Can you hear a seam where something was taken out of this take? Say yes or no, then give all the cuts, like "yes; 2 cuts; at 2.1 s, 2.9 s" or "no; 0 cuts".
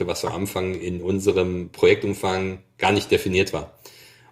no; 0 cuts